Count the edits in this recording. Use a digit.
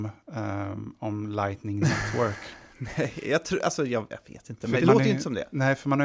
1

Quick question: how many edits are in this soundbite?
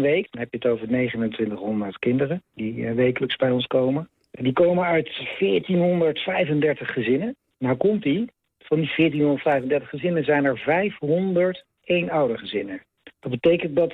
0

